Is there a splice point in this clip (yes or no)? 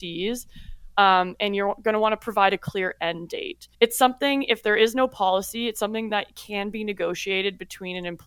yes